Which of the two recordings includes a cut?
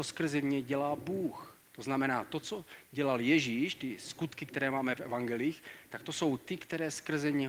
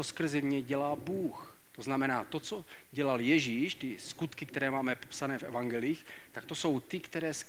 first; 1 cut; at 5.0 s

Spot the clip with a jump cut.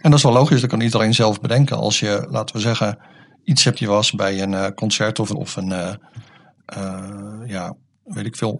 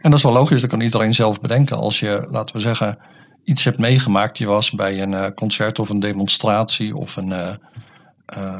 first; 2 cuts; at 3.7 s, 5.3 s

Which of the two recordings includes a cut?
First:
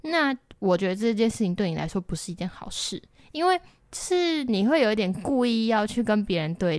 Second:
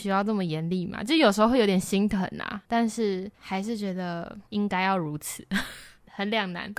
second; 3 cuts; at 2.6 s, 3.3 s, 4.5 s

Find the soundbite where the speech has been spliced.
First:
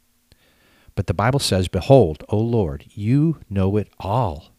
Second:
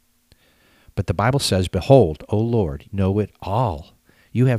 second; 1 cut; at 2.9 s

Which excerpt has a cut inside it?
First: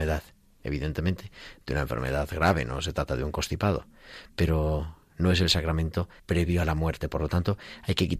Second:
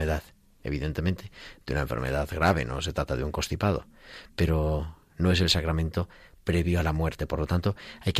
first; 1 cut; at 6.2 s

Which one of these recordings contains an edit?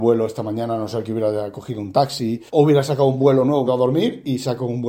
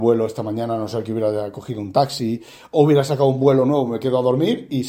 first; 2 cuts; at 2.5 s, 3.7 s

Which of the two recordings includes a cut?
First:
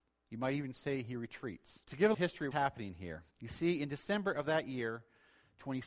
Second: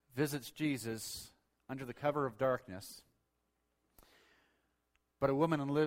first; 4 cuts; at 1.8 s, 2.1 s, 2.5 s, 3.3 s

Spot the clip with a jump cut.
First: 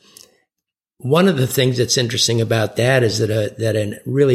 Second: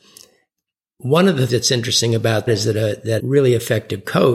second; 3 cuts; at 1.5 s, 2.5 s, 3.2 s

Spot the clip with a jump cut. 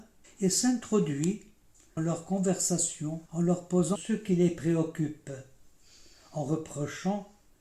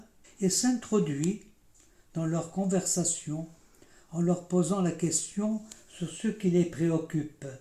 first; 3 cuts; at 2.0 s, 3.3 s, 4.0 s

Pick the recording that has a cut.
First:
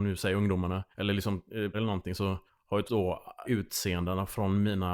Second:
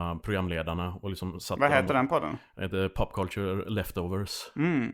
first; 5 cuts; at 0.9 s, 1.7 s, 2.5 s, 2.9 s, 3.4 s

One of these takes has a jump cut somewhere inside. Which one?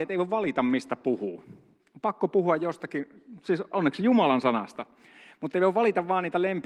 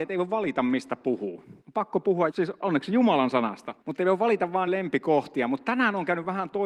second; 4 cuts; at 1.6 s, 2.3 s, 3.8 s, 4.7 s

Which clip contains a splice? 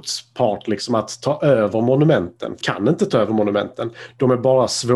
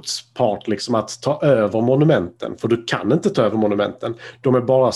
first; 1 cut; at 2.6 s

